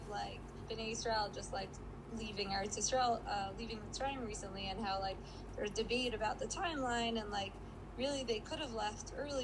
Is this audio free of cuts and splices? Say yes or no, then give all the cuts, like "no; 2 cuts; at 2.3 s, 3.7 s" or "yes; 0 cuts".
yes; 0 cuts